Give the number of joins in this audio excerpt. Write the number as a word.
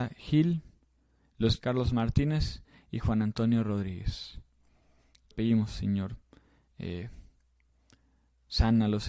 two